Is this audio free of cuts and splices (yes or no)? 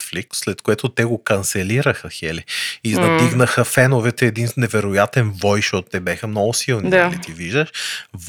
yes